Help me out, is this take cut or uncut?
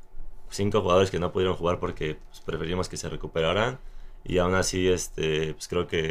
uncut